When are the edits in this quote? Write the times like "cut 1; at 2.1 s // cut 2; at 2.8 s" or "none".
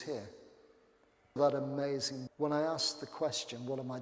cut 1; at 1.4 s // cut 2; at 2.3 s